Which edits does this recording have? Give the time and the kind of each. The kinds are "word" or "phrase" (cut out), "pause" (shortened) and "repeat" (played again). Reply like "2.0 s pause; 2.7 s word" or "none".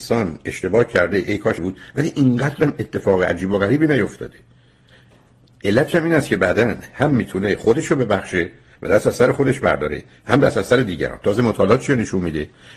1.6 s word